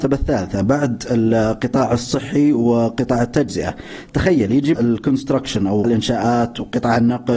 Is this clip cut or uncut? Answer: cut